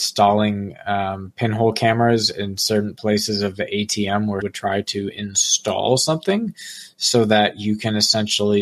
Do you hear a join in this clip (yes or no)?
yes